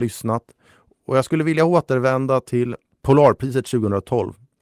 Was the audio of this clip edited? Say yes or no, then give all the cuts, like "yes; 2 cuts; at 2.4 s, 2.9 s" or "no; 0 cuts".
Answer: no; 0 cuts